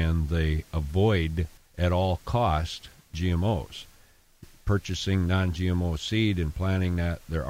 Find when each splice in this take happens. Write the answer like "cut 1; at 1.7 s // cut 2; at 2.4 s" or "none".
cut 1; at 1.6 s